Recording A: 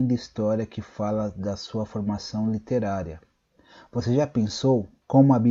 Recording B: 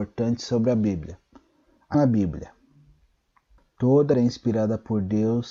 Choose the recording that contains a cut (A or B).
B